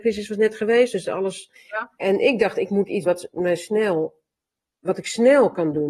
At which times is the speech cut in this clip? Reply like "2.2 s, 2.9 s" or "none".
1.5 s, 3.1 s, 4.8 s